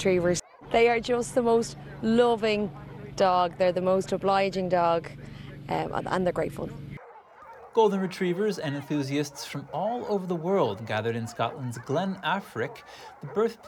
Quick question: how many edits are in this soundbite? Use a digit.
0